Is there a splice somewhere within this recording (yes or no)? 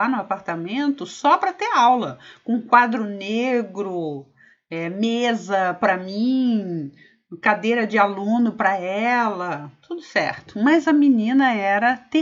no